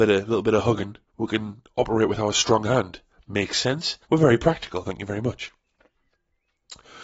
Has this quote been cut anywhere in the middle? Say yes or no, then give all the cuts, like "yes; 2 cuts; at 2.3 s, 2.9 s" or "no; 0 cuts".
yes; 2 cuts; at 1.1 s, 4.0 s